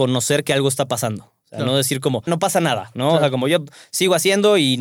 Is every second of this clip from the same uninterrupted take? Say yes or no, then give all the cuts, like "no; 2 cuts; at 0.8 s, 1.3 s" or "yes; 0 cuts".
no; 1 cut; at 2.3 s